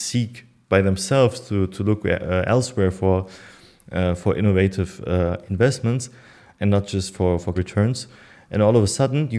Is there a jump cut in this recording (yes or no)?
yes